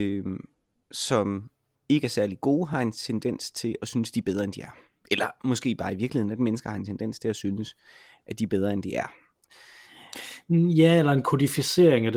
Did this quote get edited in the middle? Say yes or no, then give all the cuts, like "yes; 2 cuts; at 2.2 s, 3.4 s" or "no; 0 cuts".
no; 0 cuts